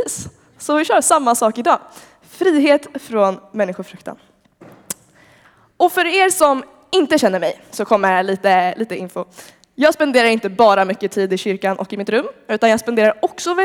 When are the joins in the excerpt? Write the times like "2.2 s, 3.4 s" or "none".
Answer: none